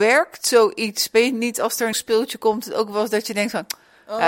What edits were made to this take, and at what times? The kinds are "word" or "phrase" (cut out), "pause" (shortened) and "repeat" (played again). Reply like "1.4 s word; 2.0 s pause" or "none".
1.9 s word